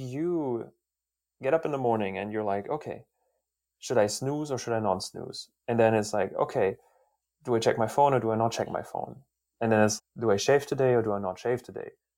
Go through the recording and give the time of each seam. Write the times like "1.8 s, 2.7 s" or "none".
10.0 s